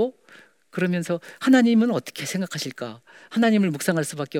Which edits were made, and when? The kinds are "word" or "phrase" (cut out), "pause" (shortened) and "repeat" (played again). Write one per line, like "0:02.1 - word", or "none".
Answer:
none